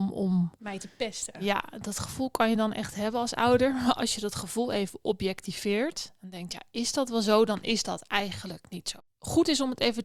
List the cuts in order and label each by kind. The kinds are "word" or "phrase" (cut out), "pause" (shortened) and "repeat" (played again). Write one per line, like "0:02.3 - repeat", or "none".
none